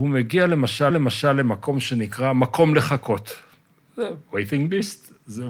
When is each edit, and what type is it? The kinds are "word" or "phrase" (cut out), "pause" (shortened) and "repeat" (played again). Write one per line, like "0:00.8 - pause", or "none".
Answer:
0:00.9 - repeat